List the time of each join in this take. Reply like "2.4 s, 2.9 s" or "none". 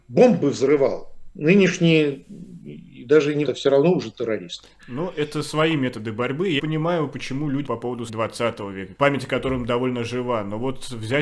1.3 s, 3.5 s, 6.6 s, 7.7 s, 8.1 s, 8.9 s